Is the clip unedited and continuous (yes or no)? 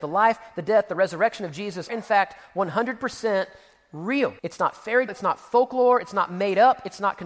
no